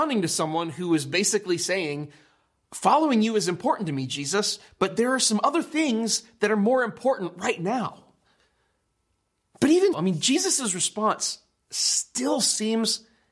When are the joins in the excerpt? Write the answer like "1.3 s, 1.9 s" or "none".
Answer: 9.9 s